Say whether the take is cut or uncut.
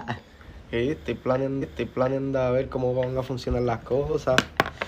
cut